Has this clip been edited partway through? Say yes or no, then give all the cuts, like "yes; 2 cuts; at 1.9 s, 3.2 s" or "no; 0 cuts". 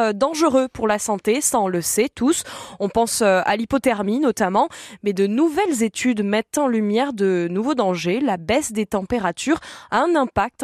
no; 0 cuts